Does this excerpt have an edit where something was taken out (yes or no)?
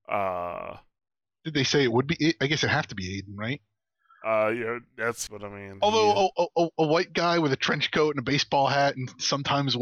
yes